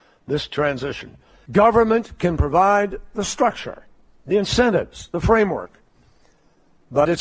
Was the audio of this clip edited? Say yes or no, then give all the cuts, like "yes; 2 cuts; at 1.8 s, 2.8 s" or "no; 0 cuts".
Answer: no; 0 cuts